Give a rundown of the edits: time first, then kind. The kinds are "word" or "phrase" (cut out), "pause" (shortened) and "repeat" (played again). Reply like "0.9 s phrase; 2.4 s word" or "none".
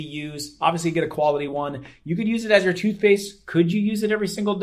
none